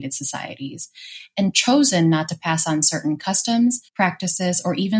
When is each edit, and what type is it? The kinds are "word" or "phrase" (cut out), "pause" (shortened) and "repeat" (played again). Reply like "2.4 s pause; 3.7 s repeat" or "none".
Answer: 3.9 s pause